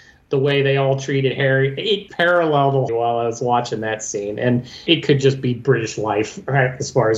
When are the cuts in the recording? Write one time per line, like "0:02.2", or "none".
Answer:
0:02.1
0:02.9
0:04.9